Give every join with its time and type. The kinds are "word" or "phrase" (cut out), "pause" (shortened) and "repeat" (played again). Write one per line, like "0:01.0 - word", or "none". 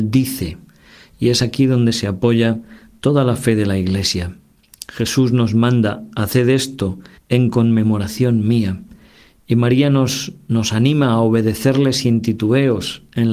0:07.1 - pause